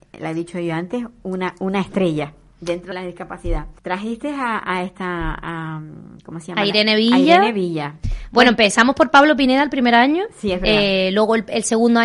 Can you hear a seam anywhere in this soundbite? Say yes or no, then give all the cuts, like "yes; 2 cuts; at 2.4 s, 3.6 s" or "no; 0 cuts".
yes; 2 cuts; at 2.9 s, 3.8 s